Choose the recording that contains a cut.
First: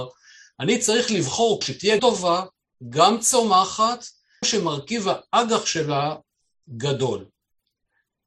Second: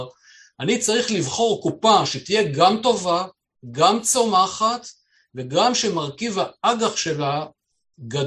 first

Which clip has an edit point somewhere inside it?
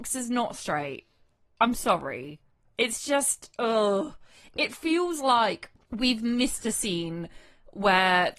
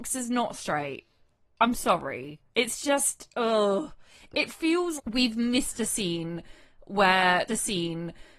second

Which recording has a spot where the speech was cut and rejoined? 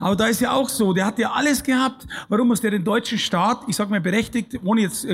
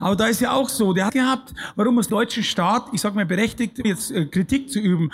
second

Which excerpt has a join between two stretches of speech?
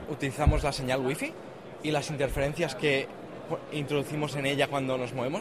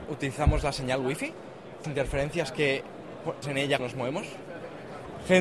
second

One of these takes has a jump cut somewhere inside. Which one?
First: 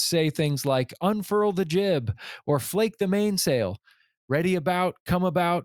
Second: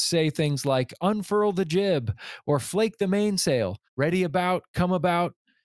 second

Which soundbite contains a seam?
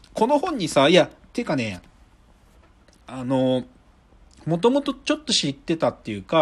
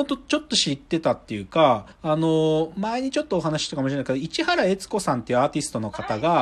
second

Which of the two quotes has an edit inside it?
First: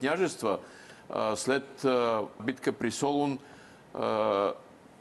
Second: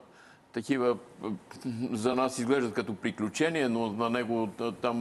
first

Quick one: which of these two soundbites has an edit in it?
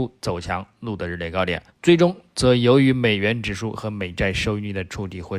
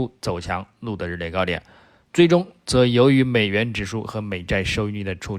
first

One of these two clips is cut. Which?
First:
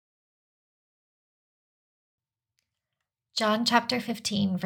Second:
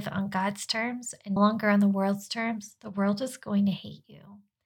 second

